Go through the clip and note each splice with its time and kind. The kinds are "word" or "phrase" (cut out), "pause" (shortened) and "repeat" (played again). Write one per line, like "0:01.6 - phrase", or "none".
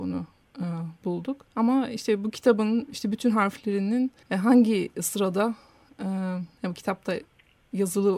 0:01.5 - pause
0:04.2 - pause